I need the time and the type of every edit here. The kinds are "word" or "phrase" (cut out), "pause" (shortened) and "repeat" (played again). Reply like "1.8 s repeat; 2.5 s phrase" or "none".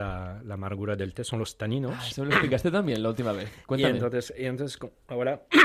none